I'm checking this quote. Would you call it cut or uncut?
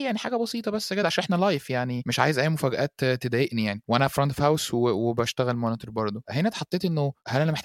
uncut